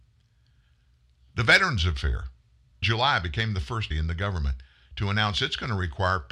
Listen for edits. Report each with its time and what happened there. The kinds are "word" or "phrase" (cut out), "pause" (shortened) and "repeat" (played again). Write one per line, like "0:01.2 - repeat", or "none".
0:02.8 - word
0:03.9 - word